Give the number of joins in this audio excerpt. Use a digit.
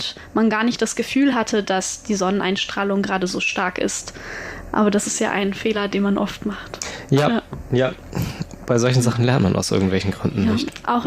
0